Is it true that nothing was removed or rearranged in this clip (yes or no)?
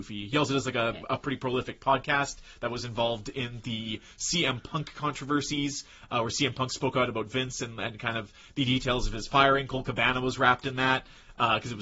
yes